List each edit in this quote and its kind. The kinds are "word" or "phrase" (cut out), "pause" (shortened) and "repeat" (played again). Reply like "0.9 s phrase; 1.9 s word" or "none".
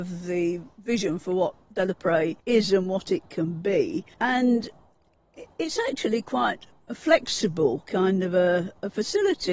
2.4 s pause; 4.1 s pause